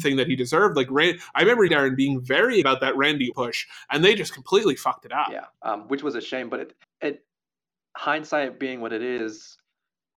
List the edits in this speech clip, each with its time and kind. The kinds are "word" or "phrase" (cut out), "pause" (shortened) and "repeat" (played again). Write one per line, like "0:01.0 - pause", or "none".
0:01.7 - phrase
0:02.6 - word
0:03.3 - word
0:05.5 - pause
0:06.8 - pause